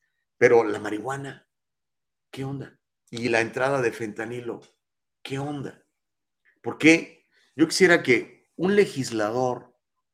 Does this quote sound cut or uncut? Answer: uncut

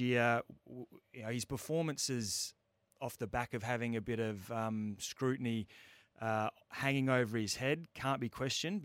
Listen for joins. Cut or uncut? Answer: uncut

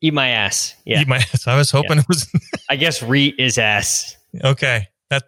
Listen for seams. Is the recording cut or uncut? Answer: uncut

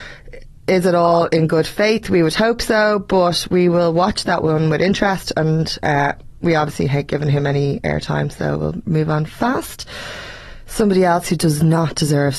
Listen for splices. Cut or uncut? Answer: uncut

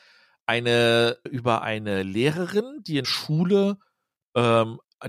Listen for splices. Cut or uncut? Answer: cut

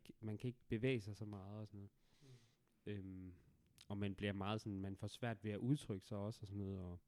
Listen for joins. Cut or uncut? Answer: uncut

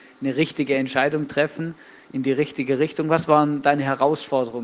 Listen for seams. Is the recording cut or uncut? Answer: uncut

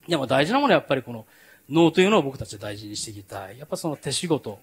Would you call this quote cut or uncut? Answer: uncut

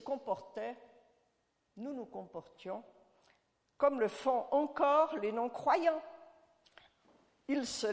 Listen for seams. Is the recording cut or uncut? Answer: uncut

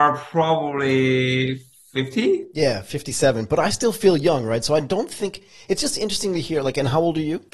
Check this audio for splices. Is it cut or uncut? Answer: uncut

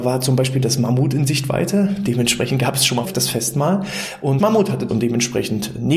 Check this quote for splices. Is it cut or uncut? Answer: cut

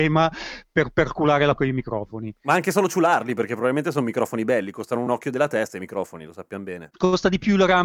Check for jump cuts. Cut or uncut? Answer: cut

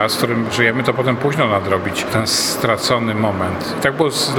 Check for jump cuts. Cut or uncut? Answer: uncut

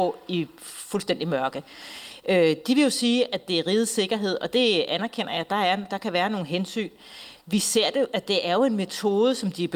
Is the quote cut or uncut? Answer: uncut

